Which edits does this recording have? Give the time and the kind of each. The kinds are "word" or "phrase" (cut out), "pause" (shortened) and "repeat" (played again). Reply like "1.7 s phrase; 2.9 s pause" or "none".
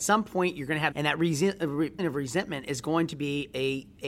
0.9 s phrase; 2.0 s word